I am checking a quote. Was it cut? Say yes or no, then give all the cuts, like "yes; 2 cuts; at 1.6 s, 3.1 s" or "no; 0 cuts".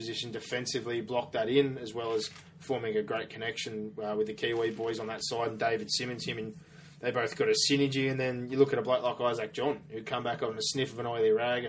no; 0 cuts